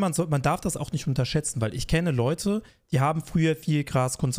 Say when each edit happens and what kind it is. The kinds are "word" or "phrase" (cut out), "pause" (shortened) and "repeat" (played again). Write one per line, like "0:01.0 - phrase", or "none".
none